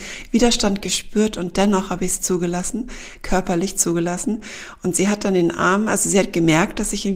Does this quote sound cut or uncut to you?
uncut